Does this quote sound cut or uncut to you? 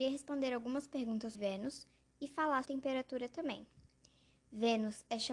cut